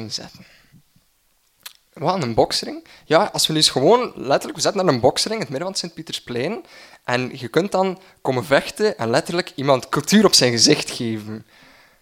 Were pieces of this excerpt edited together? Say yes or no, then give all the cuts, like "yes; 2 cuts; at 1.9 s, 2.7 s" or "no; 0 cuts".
no; 0 cuts